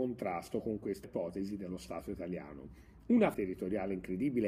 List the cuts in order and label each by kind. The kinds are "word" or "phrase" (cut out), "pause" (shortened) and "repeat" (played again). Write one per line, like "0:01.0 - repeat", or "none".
0:01.0 - word
0:03.3 - word